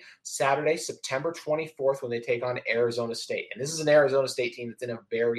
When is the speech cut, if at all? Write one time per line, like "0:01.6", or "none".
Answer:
none